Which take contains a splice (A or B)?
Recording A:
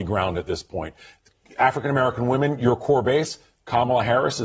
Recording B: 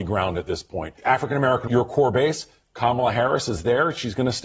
B